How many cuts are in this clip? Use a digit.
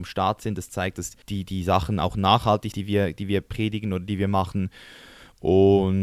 2